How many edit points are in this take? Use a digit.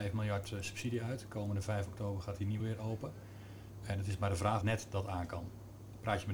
2